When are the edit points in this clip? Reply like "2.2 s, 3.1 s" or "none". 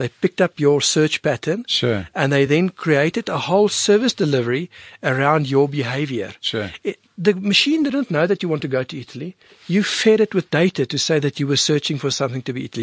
none